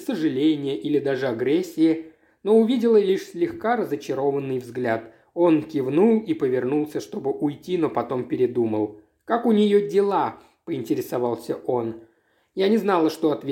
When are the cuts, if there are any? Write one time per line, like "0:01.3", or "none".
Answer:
none